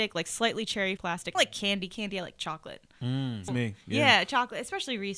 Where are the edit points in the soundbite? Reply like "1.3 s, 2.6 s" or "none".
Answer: 1.0 s, 1.3 s, 3.5 s

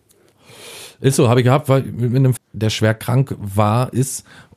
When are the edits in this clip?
2.4 s

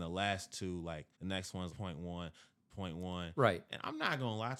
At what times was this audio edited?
1.1 s, 1.7 s

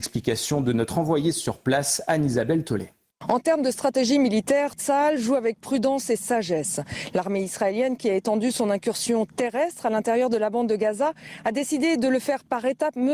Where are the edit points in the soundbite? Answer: 3.1 s

